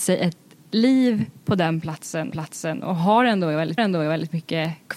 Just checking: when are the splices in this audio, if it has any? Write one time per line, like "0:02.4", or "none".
0:02.3
0:03.8